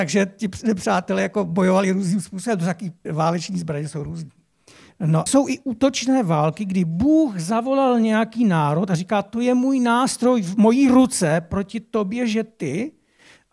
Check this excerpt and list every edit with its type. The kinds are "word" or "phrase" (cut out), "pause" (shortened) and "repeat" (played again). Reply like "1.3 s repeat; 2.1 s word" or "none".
3.1 s word; 5.3 s phrase